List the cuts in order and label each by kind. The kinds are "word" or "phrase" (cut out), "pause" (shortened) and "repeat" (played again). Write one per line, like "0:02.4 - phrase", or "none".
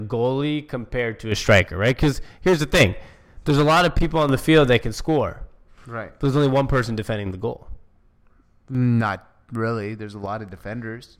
none